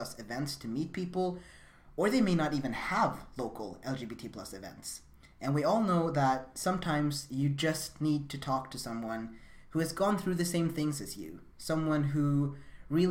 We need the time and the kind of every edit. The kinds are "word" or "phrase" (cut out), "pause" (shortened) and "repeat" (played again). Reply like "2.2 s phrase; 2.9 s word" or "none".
none